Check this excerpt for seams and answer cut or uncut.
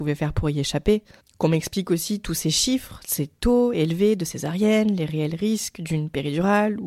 cut